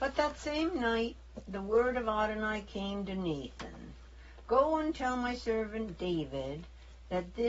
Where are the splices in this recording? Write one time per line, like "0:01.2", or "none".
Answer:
none